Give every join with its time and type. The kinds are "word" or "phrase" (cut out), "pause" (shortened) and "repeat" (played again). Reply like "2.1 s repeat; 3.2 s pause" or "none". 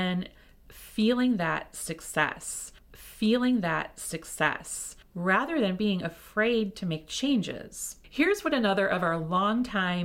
2.8 s repeat